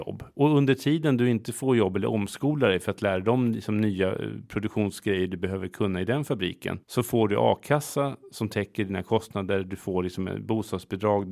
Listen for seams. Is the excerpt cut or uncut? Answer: cut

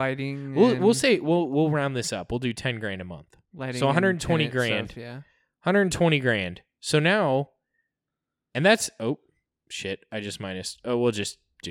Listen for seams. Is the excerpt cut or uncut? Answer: uncut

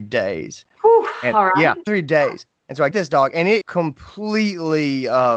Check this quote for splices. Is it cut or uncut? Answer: cut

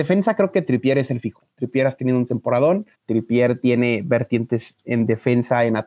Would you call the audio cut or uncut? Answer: cut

